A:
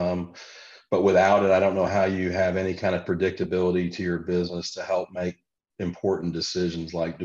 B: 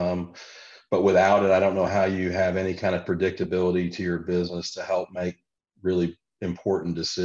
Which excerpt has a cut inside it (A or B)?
A